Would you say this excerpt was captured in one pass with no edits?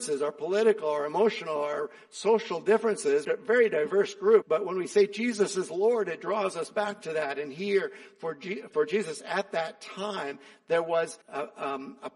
no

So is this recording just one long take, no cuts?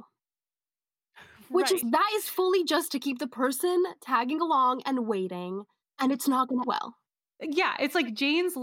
no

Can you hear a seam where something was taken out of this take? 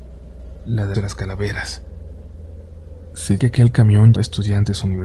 yes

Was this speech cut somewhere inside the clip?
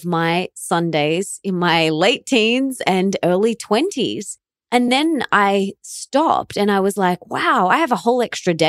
no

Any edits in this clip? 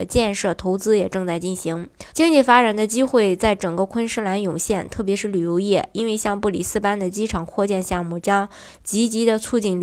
yes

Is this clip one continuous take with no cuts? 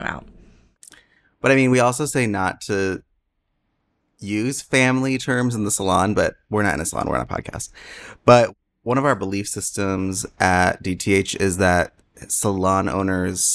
yes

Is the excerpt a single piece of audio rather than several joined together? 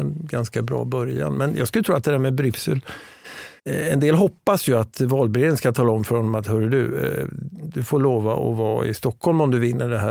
no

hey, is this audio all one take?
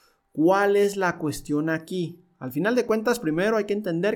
yes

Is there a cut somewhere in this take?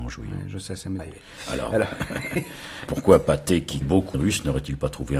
yes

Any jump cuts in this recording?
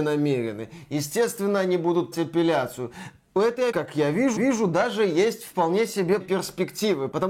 yes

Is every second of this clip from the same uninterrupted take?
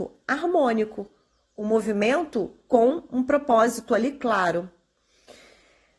yes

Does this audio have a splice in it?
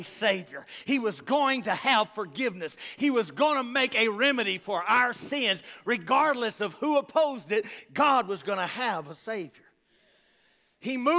no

